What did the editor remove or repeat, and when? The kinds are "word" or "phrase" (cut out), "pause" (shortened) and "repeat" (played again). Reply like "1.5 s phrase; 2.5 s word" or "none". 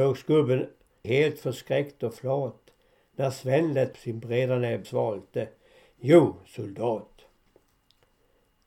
1.0 s phrase; 3.9 s word; 4.8 s word